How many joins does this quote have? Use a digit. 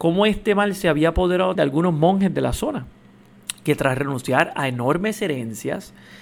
1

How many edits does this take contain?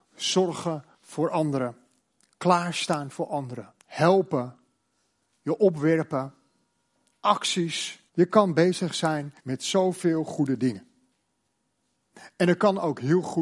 5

